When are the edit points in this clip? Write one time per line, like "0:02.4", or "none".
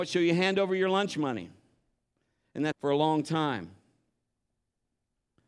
0:02.7

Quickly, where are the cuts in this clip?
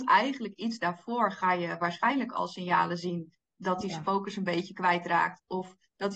none

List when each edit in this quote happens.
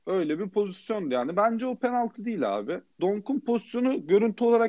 0:02.9

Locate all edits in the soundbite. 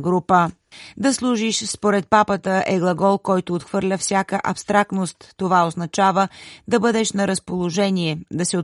none

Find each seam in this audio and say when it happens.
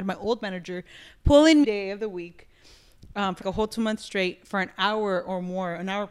0:01.6
0:03.4

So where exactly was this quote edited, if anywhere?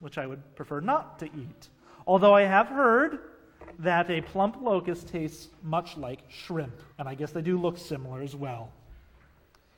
0:06.9

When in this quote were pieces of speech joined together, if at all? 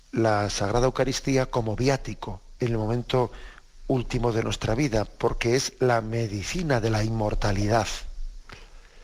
none

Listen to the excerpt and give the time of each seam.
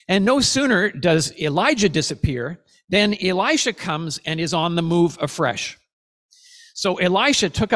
none

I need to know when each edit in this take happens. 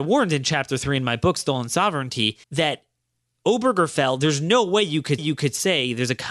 0:02.4
0:05.2

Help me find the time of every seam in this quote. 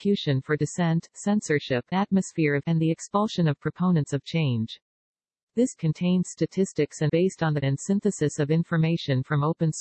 0:01.9
0:02.6
0:05.8
0:07.1
0:07.6

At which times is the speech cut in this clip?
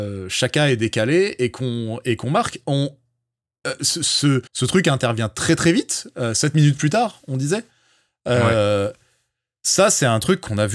0:04.5

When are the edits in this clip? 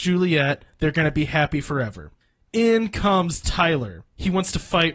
none

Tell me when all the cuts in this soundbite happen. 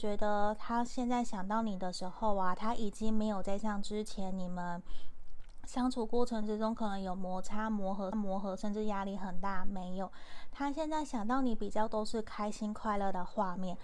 0:08.1

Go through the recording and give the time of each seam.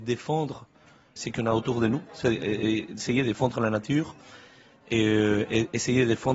0:01.2

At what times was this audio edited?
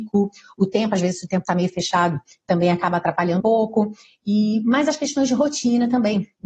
0:03.4

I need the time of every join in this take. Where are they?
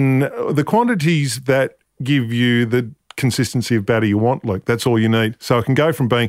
none

